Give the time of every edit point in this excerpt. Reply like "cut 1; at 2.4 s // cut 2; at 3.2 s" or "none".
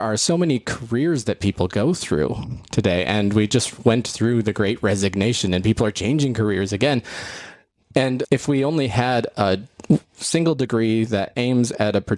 none